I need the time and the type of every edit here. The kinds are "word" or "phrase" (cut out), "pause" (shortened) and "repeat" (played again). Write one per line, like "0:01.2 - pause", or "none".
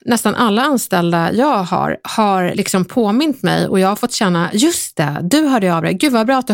none